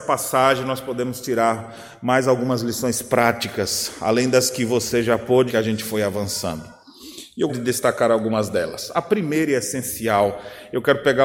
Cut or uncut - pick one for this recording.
cut